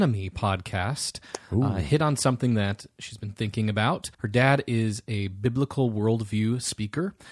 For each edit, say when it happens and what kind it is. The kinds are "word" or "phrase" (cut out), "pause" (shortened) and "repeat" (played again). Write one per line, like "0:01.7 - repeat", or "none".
0:04.1 - pause